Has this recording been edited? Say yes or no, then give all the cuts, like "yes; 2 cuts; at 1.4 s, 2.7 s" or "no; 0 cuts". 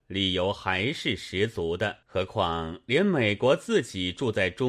yes; 1 cut; at 2.0 s